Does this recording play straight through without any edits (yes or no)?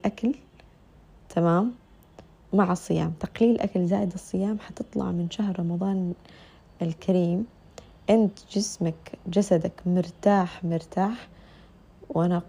yes